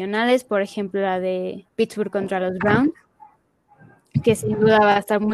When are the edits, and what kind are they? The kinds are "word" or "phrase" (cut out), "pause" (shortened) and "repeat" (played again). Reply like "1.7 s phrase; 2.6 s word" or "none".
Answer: 1.7 s pause